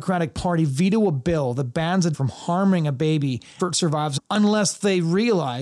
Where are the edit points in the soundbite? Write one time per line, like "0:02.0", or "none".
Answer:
0:02.1
0:03.6
0:04.2